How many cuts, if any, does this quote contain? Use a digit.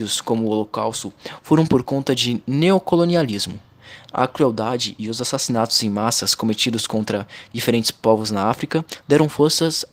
0